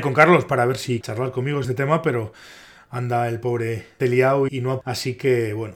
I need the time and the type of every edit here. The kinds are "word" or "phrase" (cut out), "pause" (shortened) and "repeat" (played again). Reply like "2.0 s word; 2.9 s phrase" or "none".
1.0 s word; 1.6 s word; 4.0 s word; 4.5 s word; 4.8 s word